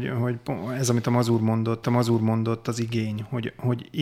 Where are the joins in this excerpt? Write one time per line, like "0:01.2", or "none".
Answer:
0:01.8

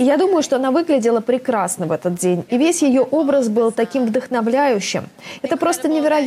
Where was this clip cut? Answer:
none

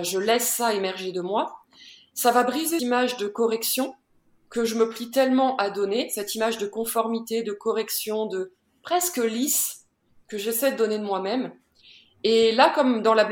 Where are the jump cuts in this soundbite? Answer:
0:02.8

